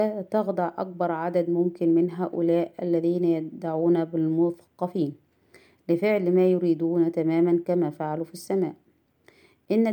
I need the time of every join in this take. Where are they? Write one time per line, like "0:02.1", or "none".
none